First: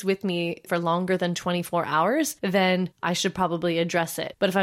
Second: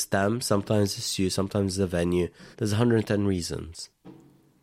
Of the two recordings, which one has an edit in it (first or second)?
second